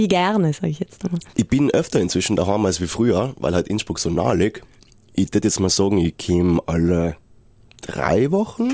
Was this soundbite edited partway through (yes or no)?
no